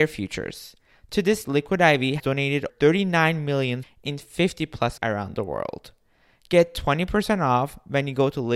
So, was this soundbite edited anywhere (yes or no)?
yes